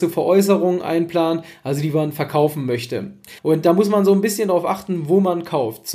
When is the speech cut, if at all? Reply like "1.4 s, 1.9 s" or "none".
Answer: 3.4 s